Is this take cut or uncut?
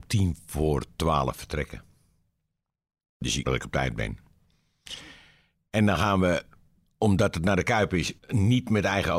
cut